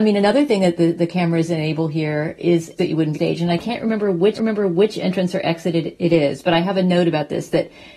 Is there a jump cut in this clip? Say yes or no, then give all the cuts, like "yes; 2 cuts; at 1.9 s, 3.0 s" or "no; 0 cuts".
yes; 3 cuts; at 2.8 s, 3.1 s, 4.3 s